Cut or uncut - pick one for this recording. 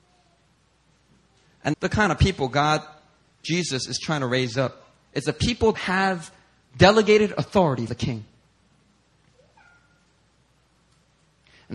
cut